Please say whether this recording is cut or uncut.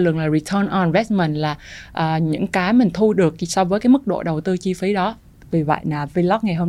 uncut